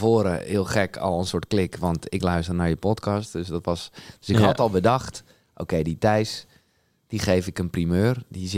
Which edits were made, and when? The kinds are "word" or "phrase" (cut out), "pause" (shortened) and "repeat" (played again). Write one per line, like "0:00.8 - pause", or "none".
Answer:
none